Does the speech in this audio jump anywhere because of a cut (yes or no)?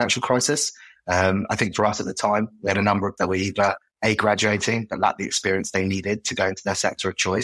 yes